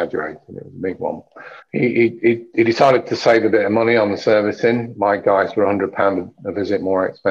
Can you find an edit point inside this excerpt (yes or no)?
yes